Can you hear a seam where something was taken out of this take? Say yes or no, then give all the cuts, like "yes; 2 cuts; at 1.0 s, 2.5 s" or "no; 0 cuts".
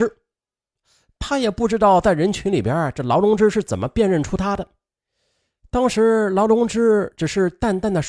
no; 0 cuts